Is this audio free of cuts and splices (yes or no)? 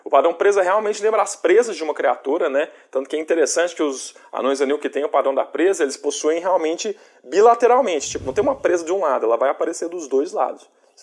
yes